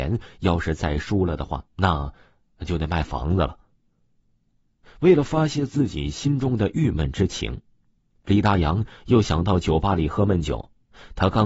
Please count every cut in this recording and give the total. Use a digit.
1